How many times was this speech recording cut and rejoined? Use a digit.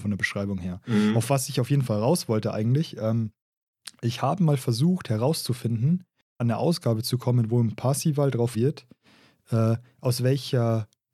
2